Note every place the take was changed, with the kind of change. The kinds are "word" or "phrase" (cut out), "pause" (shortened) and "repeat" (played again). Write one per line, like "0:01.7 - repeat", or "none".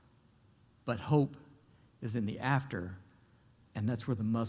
none